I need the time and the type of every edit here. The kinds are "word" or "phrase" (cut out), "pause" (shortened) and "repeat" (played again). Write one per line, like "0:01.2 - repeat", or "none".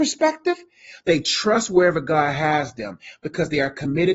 none

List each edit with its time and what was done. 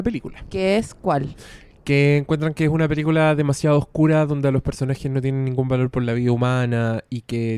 none

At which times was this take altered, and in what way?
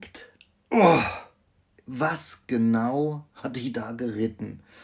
none

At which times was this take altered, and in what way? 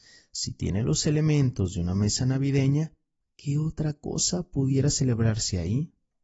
none

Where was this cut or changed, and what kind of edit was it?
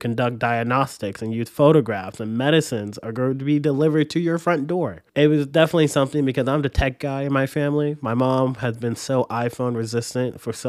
0:05.1 - pause

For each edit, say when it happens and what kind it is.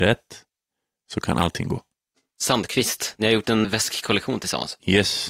0:03.6 - word

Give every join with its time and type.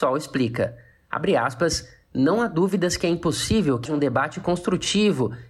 0:03.9 - word

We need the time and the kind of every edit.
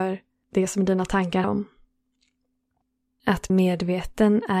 0:01.4 - word
0:03.5 - word

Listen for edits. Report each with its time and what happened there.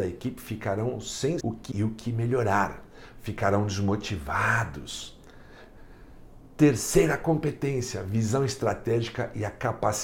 0:01.4 - word
0:01.7 - word

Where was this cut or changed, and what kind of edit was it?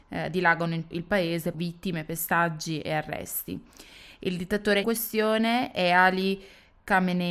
0:00.9 - word
0:01.5 - word
0:04.8 - word

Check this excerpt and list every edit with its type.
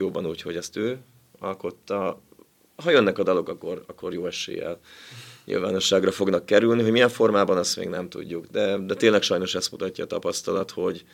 none

